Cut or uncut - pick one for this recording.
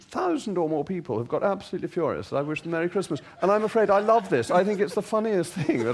uncut